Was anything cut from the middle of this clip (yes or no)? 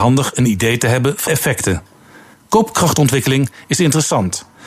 yes